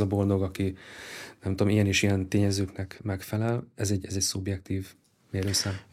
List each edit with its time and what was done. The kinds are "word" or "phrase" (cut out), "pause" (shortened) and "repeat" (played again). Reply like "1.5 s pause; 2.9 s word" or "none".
none